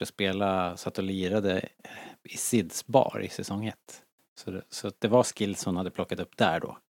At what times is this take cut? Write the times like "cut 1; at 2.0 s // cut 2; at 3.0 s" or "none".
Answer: none